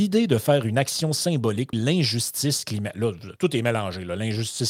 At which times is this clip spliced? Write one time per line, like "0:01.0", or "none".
0:01.7
0:03.4